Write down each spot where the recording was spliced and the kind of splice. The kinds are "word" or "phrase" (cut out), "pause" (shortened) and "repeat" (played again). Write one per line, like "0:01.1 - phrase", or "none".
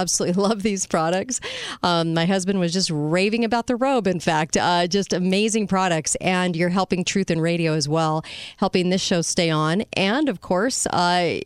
none

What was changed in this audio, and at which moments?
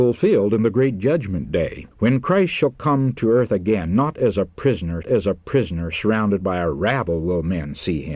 0:01.9 - pause
0:05.0 - repeat

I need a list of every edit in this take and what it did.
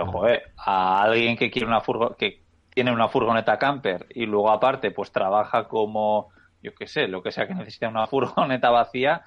none

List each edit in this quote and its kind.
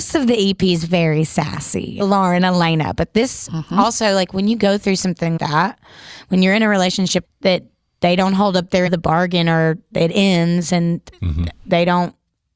0:02.0 - word
0:05.4 - word
0:07.2 - word
0:08.9 - word

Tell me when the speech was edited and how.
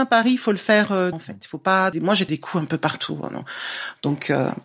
0:01.1 - word
0:01.9 - word
0:02.3 - word

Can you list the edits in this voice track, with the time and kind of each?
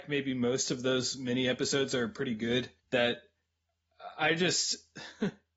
0:02.8 - pause

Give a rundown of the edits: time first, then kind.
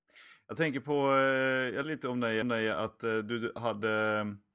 0:01.8 - word
0:02.4 - repeat

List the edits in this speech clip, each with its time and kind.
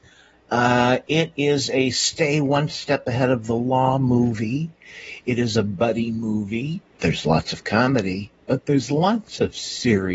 0:06.9 - pause
0:08.4 - pause

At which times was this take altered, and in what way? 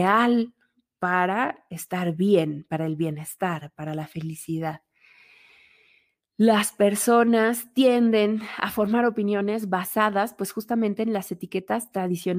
none

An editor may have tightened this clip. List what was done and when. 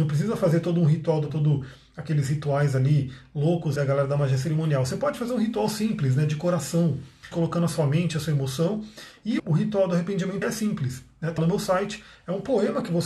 0:01.3 - word
0:03.8 - word
0:07.3 - word
0:09.4 - word
0:10.4 - word
0:11.4 - word

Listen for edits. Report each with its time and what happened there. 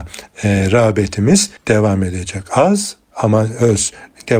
0:01.6 - pause

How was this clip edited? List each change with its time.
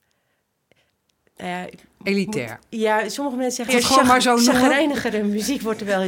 0:03.7 - word

